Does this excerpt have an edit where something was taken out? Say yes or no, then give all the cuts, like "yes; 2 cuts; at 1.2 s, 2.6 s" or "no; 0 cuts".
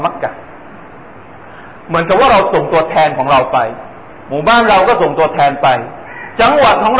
yes; 2 cuts; at 1.8 s, 4.2 s